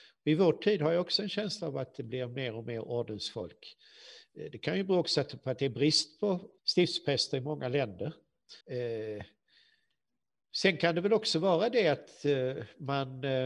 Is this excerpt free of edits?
no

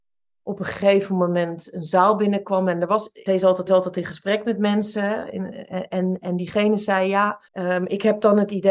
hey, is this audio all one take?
no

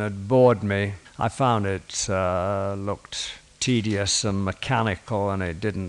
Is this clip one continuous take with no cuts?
no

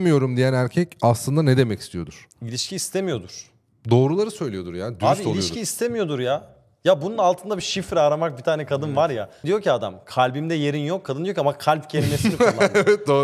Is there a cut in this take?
no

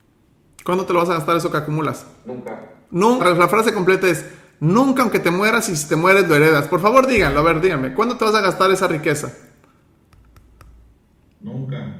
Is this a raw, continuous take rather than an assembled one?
no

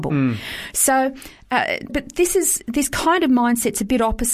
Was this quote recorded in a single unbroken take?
no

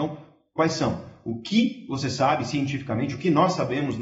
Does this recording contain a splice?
no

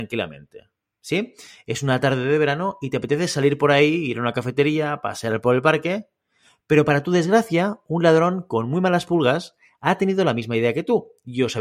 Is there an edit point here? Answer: no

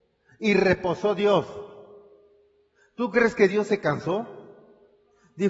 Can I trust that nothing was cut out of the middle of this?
yes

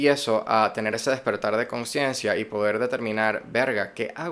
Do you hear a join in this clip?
no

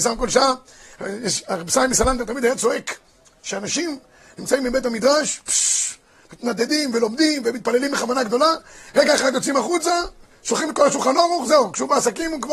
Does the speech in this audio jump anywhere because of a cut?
no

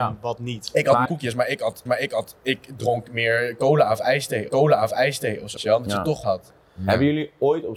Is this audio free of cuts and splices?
no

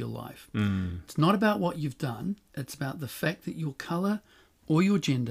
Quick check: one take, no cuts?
yes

